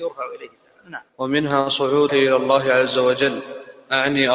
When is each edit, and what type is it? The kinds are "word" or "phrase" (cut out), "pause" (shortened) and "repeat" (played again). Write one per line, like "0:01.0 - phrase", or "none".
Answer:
0:01.1 - pause
0:02.1 - word